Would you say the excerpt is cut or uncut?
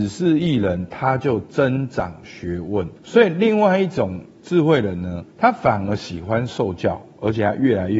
cut